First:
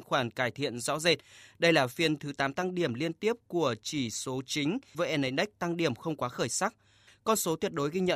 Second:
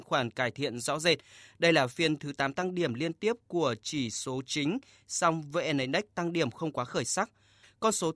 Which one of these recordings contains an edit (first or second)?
first